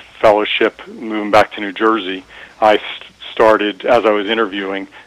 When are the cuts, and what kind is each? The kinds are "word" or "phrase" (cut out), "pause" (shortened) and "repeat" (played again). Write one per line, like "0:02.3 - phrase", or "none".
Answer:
none

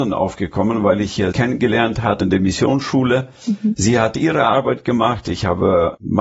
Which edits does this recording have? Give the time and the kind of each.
0:01.3 - word
0:02.2 - word

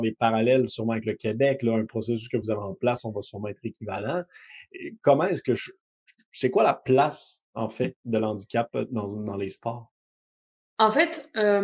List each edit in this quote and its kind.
none

